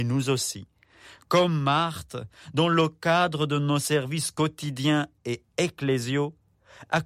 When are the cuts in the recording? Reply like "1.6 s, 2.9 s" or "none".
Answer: none